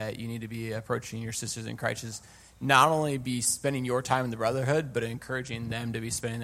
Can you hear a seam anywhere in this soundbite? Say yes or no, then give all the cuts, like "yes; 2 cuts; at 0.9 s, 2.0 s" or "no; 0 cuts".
no; 0 cuts